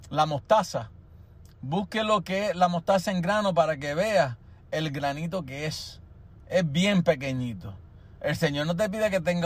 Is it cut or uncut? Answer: uncut